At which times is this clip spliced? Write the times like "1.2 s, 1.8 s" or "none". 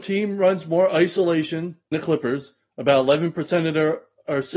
1.9 s